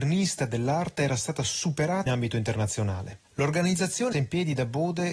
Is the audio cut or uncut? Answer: cut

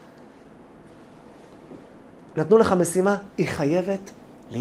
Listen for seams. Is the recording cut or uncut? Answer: uncut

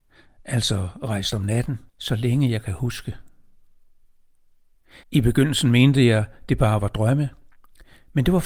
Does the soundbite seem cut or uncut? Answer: cut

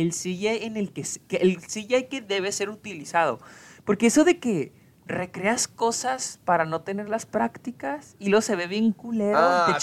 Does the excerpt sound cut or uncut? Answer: uncut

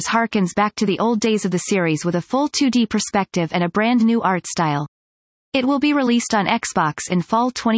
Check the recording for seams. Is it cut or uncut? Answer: uncut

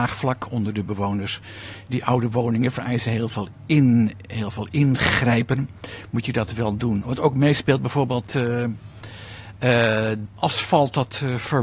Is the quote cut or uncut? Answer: cut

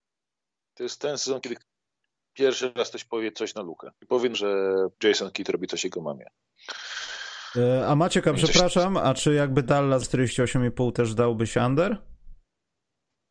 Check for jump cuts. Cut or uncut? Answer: cut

